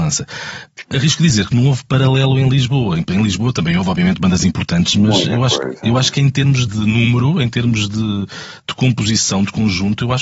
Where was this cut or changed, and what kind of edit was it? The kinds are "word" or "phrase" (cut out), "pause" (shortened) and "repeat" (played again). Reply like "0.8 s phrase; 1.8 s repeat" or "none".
6.7 s word